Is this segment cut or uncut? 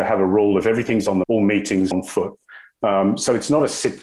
cut